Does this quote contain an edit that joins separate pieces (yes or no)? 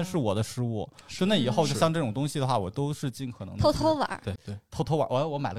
yes